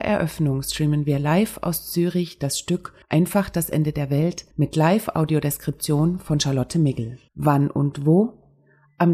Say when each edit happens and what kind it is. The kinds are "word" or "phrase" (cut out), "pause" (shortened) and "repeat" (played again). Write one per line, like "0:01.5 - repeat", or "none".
0:03.0 - pause
0:04.5 - pause
0:07.3 - pause